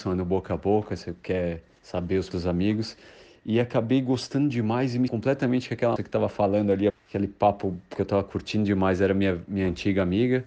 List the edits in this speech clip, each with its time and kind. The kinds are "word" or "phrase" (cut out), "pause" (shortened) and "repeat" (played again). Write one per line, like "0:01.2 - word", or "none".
0:02.3 - word
0:05.1 - word
0:06.0 - word
0:06.9 - word